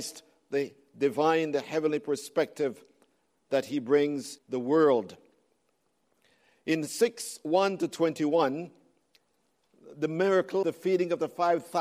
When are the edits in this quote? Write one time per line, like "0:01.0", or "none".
0:04.4
0:10.6